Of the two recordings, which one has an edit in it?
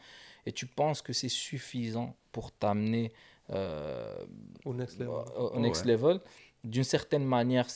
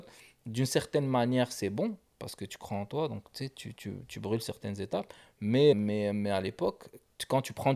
second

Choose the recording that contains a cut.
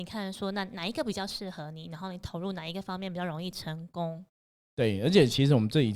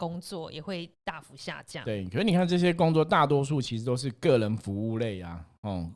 second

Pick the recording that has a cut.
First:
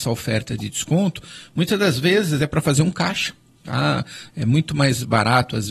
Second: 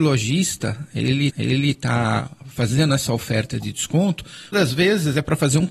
second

